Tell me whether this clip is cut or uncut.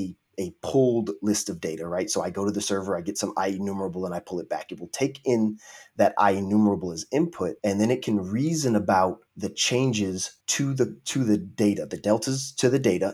cut